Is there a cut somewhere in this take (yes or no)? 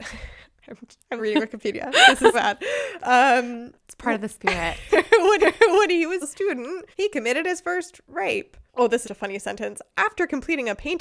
yes